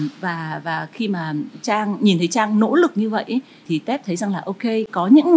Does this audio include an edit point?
yes; 1 cut; at 3.7 s

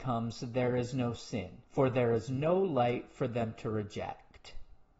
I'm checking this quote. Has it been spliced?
yes; 1 cut; at 1.6 s

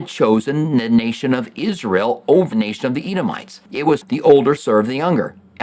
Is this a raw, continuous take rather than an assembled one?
no; 4 cuts; at 2.5 s, 3.7 s, 4.0 s, 4.6 s

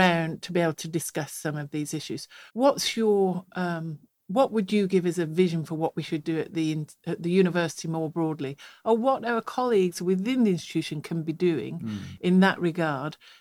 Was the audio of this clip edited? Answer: yes; 1 cut; at 2.5 s

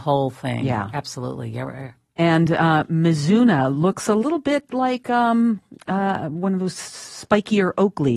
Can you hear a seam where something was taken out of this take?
no; 0 cuts

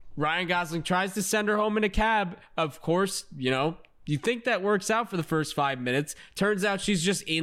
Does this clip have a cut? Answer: no; 0 cuts

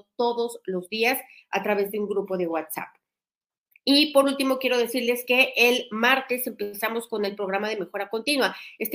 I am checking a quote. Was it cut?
no; 0 cuts

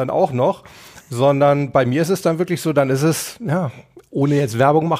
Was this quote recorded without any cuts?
yes; 0 cuts

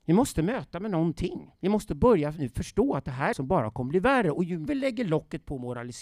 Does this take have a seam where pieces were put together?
yes; 3 cuts; at 1.6 s, 3.3 s, 4.7 s

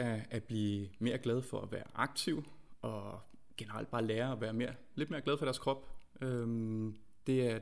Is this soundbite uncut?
yes; 0 cuts

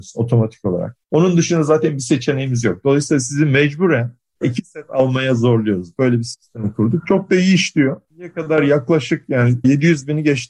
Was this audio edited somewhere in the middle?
yes; 2 cuts; at 1.0 s, 8.1 s

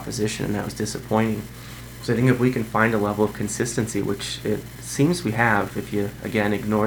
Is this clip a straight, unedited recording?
yes; 0 cuts

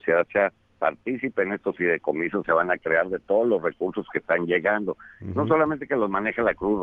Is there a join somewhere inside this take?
yes; 1 cut; at 2.4 s

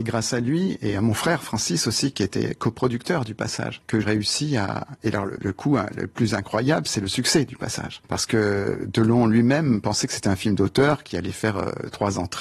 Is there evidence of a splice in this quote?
yes; 1 cut; at 4.0 s

